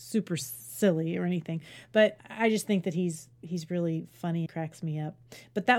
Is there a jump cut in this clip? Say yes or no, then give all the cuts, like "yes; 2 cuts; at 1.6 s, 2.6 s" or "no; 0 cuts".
yes; 3 cuts; at 2.2 s, 3.3 s, 4.5 s